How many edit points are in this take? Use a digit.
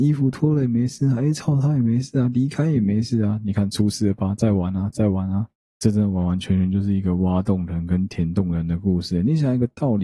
0